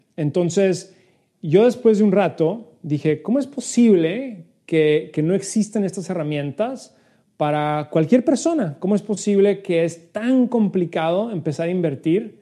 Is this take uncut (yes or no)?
yes